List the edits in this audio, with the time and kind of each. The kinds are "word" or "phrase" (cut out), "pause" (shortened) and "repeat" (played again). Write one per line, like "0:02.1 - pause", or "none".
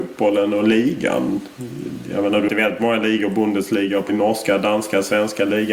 0:02.5 - phrase
0:04.1 - phrase